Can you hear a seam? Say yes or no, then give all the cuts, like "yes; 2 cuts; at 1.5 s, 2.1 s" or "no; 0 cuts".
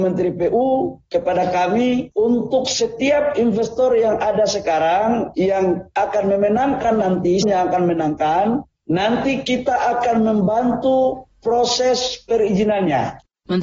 yes; 1 cut; at 7.4 s